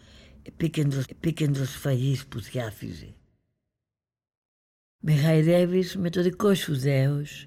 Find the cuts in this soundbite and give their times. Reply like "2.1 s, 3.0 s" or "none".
1.0 s